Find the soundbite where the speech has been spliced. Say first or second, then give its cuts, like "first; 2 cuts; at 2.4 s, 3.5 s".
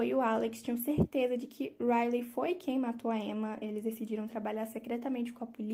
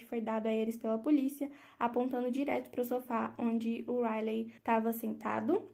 second; 1 cut; at 4.6 s